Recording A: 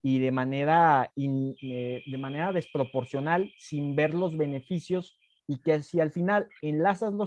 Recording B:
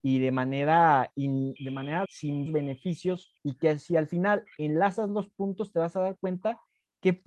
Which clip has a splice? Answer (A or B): B